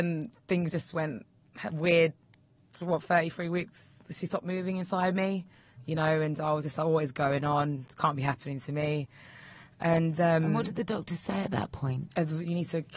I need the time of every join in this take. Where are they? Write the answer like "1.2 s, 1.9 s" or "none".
none